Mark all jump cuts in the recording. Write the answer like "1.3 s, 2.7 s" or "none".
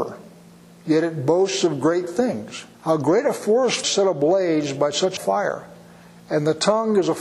2.7 s, 5.2 s